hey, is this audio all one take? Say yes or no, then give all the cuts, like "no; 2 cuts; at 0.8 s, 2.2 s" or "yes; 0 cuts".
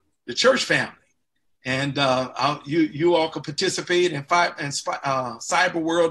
yes; 0 cuts